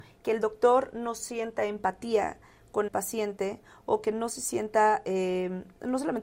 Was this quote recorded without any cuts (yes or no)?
no